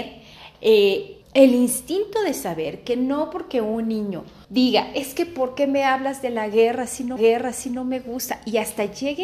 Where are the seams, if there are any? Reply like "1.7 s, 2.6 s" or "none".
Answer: 1.2 s, 4.4 s, 7.2 s